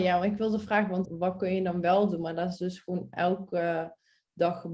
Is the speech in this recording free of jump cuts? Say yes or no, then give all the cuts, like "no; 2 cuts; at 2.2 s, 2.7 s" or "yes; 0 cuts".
no; 1 cut; at 1.0 s